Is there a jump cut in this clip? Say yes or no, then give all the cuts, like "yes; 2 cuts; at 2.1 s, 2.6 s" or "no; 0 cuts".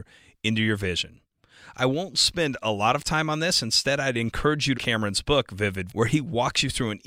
yes; 2 cuts; at 4.7 s, 5.9 s